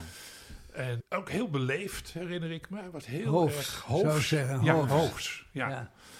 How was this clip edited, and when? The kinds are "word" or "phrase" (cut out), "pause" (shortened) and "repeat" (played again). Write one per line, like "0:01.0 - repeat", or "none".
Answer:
0:01.0 - word
0:03.0 - word